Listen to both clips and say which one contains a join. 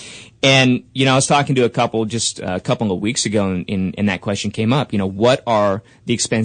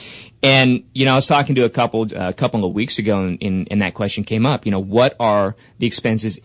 second; 1 cut; at 2.1 s

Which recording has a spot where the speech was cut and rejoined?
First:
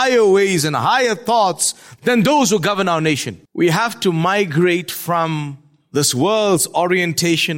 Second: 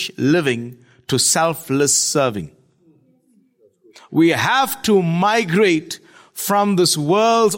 first; 1 cut; at 3.5 s

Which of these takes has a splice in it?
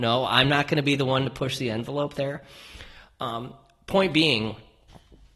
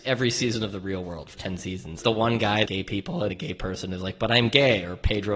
second; 4 cuts; at 1.3 s, 2.0 s, 2.7 s, 3.3 s

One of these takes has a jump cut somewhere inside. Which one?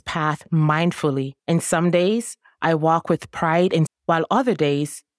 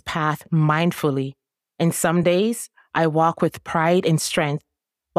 first; 2 cuts; at 1.4 s, 3.9 s

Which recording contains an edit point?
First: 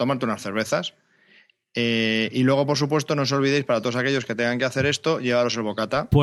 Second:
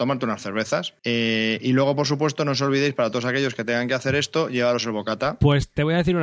second; 1 cut; at 1.0 s

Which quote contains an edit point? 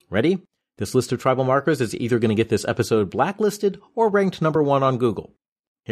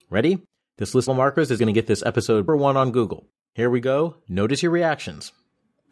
second; 4 cuts; at 1.1 s, 1.6 s, 2.5 s, 3.4 s

